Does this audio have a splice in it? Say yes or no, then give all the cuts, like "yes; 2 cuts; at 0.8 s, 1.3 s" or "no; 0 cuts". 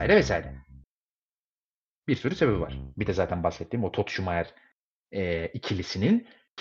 no; 0 cuts